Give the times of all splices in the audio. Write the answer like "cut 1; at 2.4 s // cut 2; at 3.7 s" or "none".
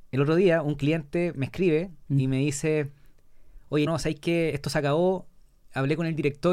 cut 1; at 3.9 s // cut 2; at 4.5 s